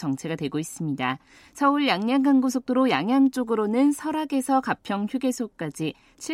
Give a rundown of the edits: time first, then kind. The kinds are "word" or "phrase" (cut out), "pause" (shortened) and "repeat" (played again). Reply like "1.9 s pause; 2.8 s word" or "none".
none